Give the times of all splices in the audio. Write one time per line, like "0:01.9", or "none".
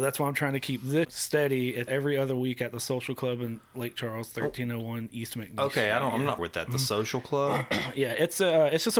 0:01.0
0:01.9
0:06.4